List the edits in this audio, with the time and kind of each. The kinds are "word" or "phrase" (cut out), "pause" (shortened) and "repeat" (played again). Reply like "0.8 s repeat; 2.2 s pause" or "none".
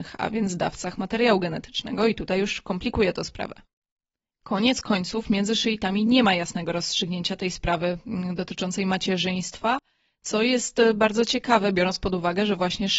none